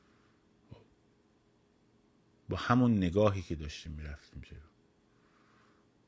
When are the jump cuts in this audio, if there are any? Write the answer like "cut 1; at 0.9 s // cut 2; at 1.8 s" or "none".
none